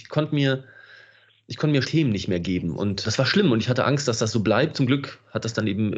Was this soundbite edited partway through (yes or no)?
yes